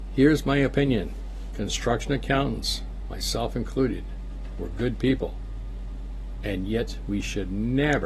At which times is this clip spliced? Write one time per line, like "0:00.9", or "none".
none